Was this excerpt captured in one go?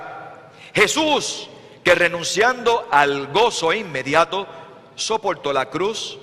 yes; 0 cuts

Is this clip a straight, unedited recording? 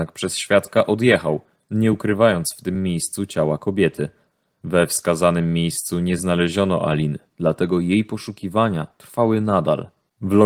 yes; 0 cuts

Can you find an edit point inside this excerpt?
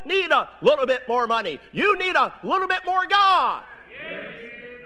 no; 0 cuts

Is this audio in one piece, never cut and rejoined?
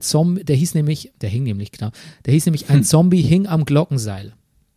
yes; 0 cuts

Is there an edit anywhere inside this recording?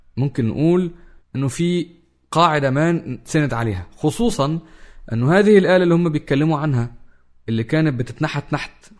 no; 0 cuts

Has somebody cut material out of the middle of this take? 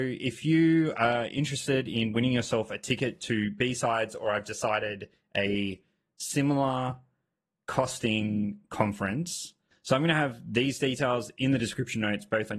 no; 0 cuts

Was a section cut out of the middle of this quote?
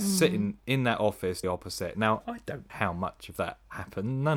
yes; 3 cuts; at 1.4 s, 2.2 s, 2.7 s

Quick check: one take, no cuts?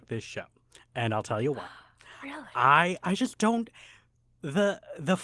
yes; 0 cuts

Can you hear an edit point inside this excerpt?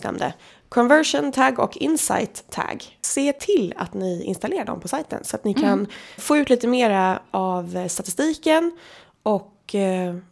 yes; 1 cut; at 6.2 s

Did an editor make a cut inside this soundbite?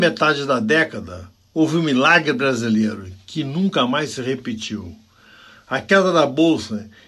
no; 0 cuts

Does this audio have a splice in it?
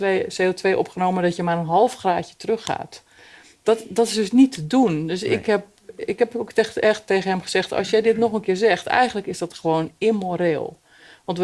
no; 0 cuts

